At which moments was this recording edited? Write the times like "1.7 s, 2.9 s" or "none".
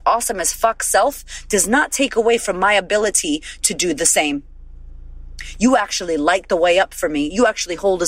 none